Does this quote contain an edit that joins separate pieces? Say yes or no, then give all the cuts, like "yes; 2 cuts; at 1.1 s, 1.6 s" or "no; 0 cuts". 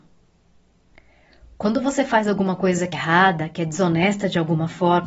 yes; 1 cut; at 2.9 s